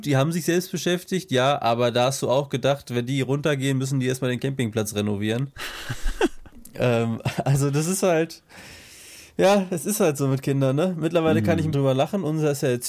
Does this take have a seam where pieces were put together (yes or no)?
yes